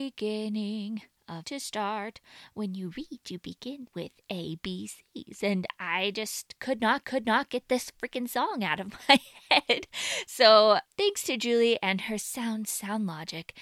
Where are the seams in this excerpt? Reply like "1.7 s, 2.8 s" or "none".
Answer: 1.4 s, 7.0 s, 10.9 s